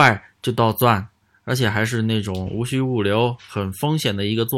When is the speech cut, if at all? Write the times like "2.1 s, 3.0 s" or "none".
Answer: none

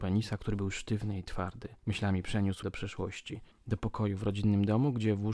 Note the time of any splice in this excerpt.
1.8 s, 2.6 s, 3.5 s

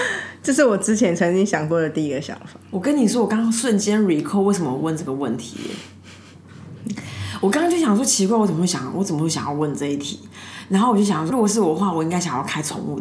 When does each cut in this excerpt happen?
11.3 s

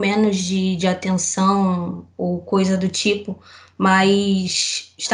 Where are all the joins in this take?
none

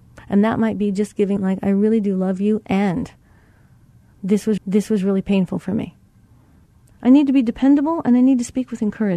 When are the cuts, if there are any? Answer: 1.4 s, 4.6 s, 6.7 s

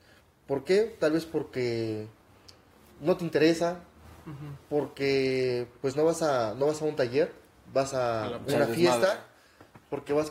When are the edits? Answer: none

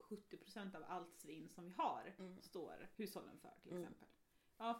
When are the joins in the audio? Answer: none

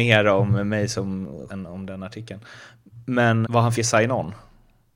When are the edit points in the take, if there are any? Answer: 1.5 s, 3.4 s, 3.7 s

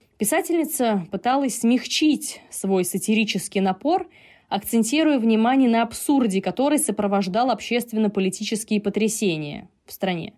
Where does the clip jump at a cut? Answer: none

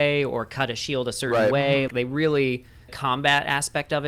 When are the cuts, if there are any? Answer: 1.9 s, 2.9 s

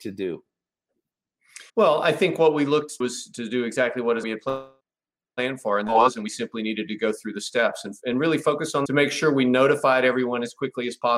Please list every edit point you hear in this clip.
1.7 s, 3.0 s, 4.2 s, 4.8 s, 8.9 s

